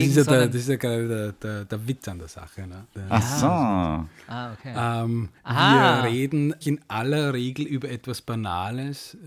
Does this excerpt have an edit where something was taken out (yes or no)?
yes